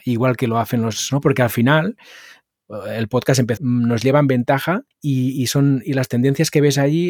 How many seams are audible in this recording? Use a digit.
3